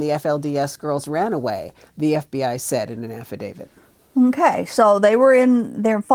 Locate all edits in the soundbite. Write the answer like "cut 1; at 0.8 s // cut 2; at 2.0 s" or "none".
none